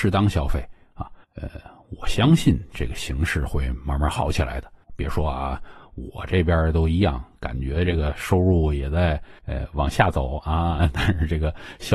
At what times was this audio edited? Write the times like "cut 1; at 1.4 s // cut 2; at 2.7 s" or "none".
cut 1; at 1.2 s // cut 2; at 4.8 s // cut 3; at 9.4 s